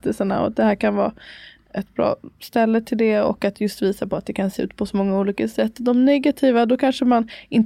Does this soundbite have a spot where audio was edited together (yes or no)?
no